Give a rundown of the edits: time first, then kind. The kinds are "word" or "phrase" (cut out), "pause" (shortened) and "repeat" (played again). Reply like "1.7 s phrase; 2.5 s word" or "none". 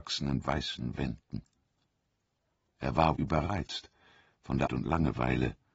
3.2 s word; 4.7 s word